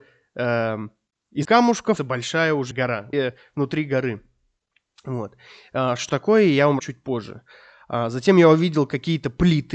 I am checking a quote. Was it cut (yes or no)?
yes